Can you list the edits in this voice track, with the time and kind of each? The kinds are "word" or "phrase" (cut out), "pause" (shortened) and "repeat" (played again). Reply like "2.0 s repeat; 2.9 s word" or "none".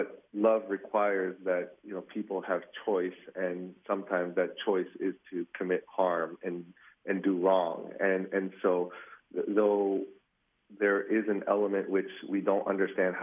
none